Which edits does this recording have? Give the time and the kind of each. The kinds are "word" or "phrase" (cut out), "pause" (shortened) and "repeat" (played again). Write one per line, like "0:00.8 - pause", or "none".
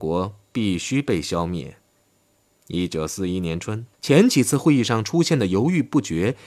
0:01.9 - pause
0:03.9 - pause